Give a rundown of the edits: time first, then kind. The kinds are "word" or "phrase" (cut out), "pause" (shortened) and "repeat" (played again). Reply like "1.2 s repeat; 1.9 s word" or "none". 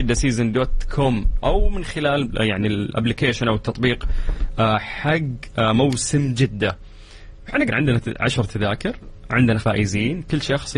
7.7 s phrase; 9.6 s word